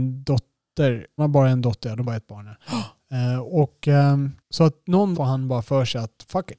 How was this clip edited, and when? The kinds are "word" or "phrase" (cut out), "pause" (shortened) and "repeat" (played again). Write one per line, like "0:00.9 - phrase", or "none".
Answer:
0:01.2 - word
0:02.0 - word
0:04.4 - pause
0:05.1 - word

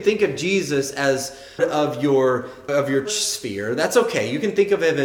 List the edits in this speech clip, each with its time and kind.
0:01.6 - word
0:02.7 - word
0:03.1 - word

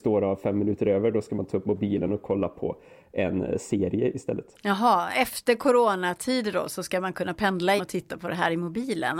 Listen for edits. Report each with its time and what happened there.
0:07.8 - word

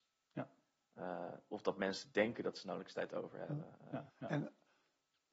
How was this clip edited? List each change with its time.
0:04.1 - pause

